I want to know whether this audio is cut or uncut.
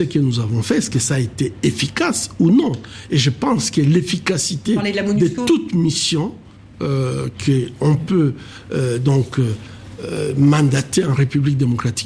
uncut